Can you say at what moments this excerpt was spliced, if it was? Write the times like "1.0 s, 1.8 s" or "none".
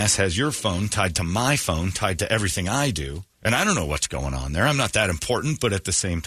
3.3 s